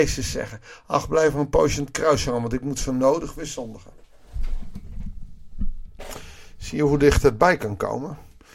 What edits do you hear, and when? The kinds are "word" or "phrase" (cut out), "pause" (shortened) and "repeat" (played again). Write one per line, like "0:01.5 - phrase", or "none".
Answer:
none